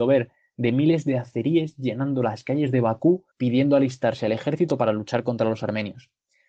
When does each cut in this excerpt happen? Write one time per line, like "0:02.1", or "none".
0:03.3